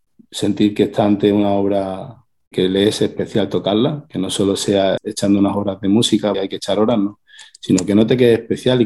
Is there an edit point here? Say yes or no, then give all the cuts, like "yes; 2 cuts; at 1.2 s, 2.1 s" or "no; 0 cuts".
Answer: yes; 3 cuts; at 2.5 s, 5.0 s, 6.3 s